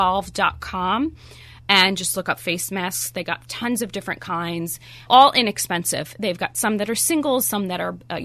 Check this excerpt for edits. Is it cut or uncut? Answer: cut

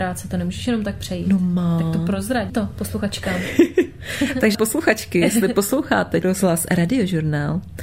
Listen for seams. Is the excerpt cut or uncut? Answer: cut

